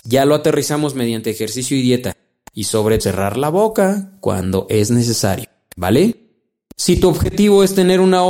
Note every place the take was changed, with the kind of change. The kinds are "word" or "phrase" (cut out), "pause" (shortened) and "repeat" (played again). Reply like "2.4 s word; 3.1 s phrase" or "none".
3.0 s word

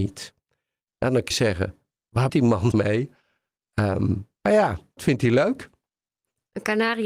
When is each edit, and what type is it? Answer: 1.3 s word; 2.3 s word; 2.7 s word; 5.0 s word

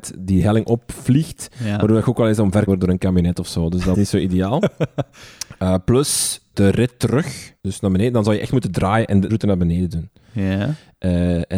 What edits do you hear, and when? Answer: 2.7 s phrase; 3.9 s word; 6.5 s word; 7.6 s pause; 9.3 s word

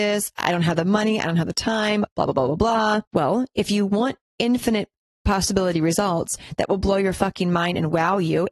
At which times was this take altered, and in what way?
3.0 s pause

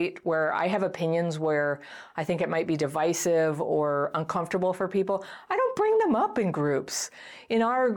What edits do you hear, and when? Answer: none

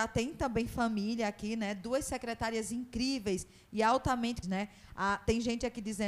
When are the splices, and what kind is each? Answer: 4.4 s word

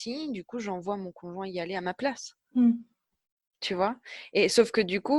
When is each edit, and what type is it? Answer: none

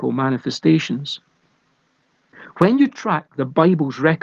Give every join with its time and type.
none

